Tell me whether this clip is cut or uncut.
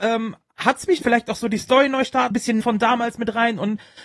cut